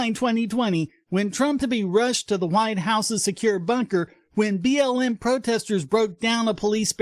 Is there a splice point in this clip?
yes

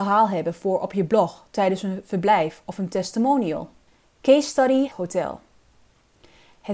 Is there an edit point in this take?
yes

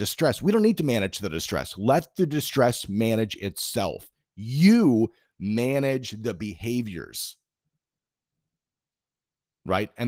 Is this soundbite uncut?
yes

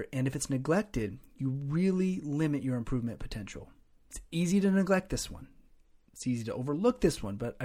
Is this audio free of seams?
yes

